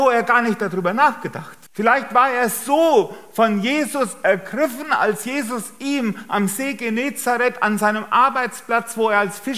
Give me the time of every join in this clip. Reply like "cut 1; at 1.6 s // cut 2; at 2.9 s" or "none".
cut 1; at 1.7 s